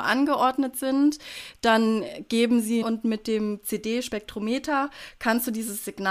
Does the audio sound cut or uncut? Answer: cut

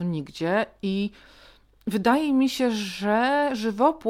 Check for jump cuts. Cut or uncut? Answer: uncut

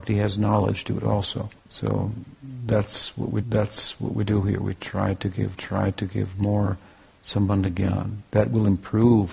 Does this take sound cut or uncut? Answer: cut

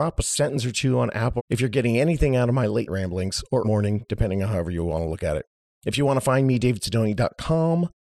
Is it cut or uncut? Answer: cut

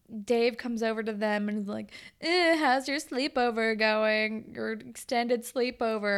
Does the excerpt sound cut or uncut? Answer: uncut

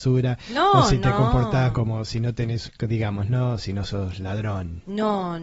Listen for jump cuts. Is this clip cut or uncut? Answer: cut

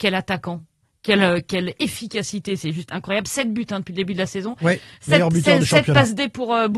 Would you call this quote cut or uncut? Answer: uncut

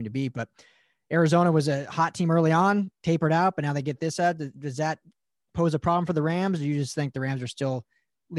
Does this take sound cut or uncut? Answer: uncut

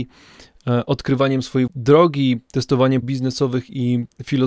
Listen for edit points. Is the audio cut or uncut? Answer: cut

